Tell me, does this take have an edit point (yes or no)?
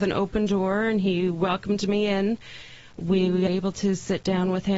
yes